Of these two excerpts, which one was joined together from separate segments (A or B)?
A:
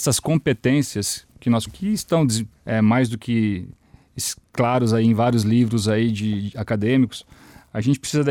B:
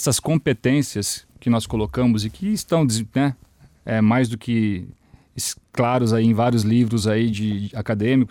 A